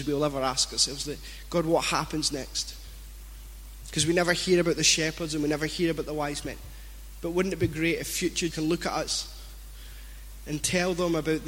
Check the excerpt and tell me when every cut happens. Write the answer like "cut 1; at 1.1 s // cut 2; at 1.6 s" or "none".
cut 1; at 8.5 s

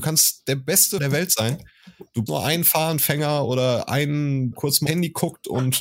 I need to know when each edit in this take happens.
cut 1; at 1.0 s // cut 2; at 2.3 s // cut 3; at 4.5 s // cut 4; at 4.9 s

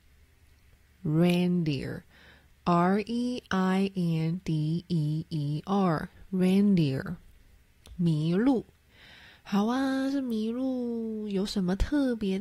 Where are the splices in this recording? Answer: none

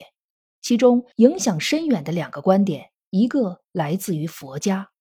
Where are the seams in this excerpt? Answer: cut 1; at 1.1 s

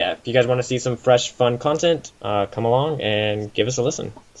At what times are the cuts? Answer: cut 1; at 2.2 s

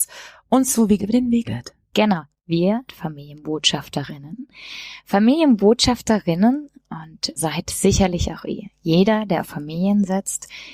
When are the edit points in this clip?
cut 1; at 1.0 s // cut 2; at 1.4 s // cut 3; at 2.9 s // cut 4; at 7.4 s

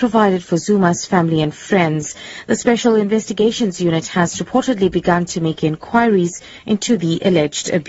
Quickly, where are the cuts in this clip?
none

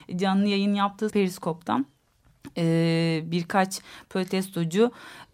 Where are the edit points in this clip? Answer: cut 1; at 1.1 s

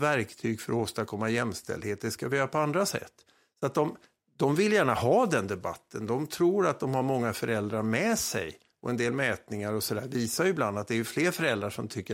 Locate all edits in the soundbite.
none

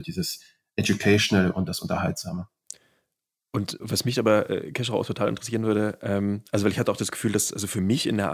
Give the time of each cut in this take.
cut 1; at 3.8 s

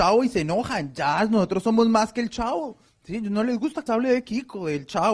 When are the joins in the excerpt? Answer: cut 1; at 2.9 s // cut 2; at 3.9 s

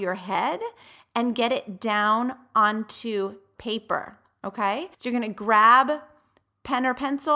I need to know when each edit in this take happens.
cut 1; at 4.9 s

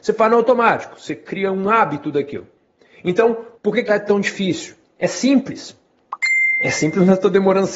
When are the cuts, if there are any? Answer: cut 1; at 3.5 s // cut 2; at 3.9 s

